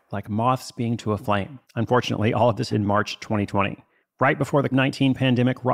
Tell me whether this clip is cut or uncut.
cut